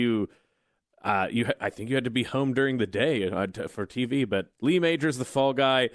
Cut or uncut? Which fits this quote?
uncut